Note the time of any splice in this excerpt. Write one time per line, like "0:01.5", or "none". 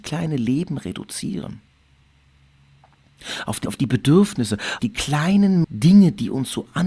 0:03.7
0:04.8
0:05.6